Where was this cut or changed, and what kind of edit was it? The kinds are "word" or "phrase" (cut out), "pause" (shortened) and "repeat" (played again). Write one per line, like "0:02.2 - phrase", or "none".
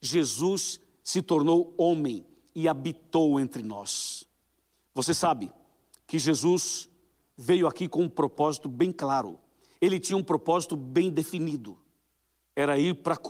none